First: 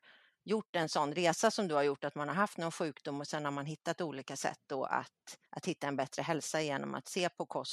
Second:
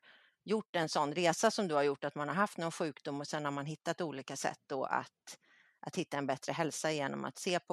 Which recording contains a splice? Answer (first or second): first